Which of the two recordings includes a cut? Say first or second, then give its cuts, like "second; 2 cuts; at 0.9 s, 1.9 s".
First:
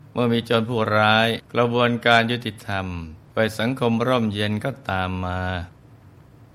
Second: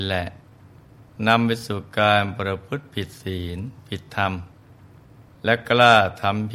first; 2 cuts; at 1.4 s, 3.3 s